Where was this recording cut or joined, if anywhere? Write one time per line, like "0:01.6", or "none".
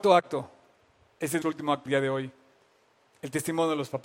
0:01.4
0:01.9